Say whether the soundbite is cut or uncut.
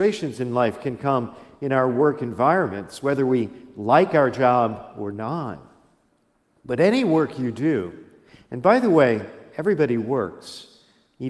uncut